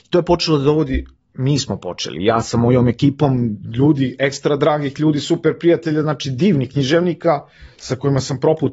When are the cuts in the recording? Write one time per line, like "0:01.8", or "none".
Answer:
none